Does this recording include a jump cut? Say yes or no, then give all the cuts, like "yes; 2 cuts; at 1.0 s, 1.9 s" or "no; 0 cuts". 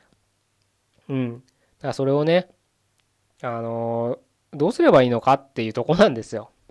no; 0 cuts